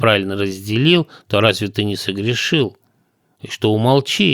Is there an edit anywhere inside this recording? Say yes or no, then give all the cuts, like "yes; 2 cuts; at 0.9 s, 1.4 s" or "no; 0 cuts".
no; 0 cuts